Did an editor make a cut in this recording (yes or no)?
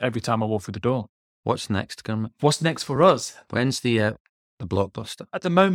no